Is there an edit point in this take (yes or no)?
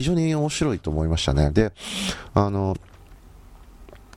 no